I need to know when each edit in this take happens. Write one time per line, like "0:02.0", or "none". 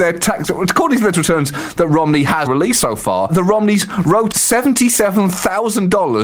0:01.1
0:02.5
0:03.3
0:04.3